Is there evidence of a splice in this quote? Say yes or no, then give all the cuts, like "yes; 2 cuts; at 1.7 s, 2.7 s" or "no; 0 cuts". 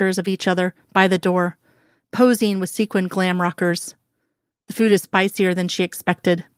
no; 0 cuts